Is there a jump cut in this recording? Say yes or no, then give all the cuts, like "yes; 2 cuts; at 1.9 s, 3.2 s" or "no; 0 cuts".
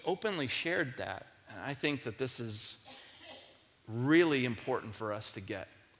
no; 0 cuts